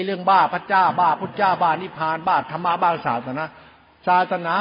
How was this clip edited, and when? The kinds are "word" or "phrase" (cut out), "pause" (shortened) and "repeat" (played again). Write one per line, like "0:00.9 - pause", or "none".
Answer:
none